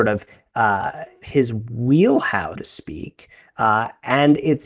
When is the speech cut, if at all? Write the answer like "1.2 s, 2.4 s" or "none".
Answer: 1.2 s, 2.5 s